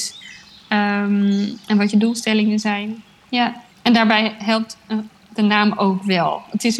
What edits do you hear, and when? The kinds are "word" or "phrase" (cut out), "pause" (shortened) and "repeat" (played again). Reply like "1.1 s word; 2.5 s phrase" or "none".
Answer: 3.7 s pause